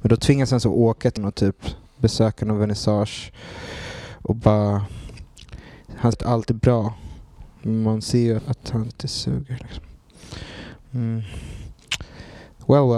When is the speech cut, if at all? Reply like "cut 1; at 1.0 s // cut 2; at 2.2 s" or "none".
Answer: cut 1; at 1.2 s // cut 2; at 6.1 s // cut 3; at 8.4 s // cut 4; at 8.9 s